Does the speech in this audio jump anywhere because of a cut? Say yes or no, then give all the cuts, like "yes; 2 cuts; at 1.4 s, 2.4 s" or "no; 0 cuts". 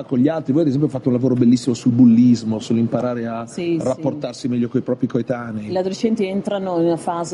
no; 0 cuts